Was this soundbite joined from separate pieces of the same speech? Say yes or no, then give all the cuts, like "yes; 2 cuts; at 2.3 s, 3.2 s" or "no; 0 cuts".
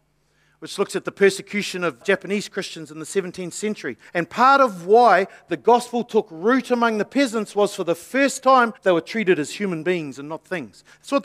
yes; 3 cuts; at 2.0 s, 4.1 s, 8.8 s